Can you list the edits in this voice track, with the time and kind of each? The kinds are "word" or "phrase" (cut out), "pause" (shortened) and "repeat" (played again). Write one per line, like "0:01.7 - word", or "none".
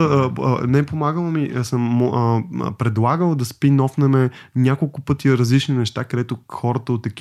none